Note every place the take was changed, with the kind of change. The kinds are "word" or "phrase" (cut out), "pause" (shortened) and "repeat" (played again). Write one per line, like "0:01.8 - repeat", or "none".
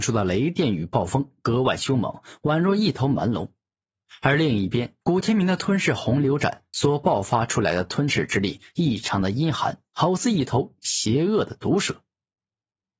0:05.0 - pause